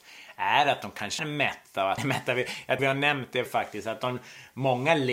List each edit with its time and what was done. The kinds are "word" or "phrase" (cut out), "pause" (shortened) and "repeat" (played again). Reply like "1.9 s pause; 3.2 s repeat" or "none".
1.2 s word; 2.0 s word; 2.8 s word; 3.5 s word